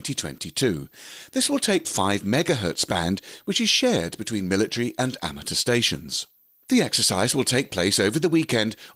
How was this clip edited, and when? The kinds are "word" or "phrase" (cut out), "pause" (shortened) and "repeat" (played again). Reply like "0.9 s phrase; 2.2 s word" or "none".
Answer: 1.8 s phrase